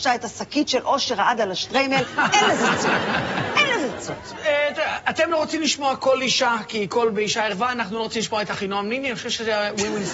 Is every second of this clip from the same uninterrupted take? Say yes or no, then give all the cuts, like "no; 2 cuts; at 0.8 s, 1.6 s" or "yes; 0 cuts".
yes; 0 cuts